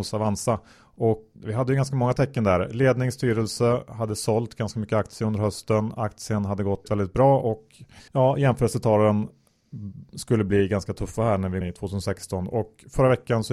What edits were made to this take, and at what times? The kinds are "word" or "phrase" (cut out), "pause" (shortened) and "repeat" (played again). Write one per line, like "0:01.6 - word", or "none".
0:01.3 - word
0:06.8 - word
0:08.1 - pause
0:11.6 - phrase